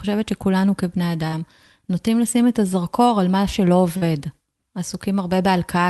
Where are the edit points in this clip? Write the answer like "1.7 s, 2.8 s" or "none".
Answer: none